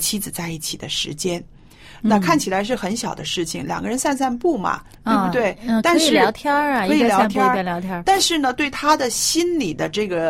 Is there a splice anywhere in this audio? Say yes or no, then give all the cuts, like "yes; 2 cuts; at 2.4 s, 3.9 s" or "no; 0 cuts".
no; 0 cuts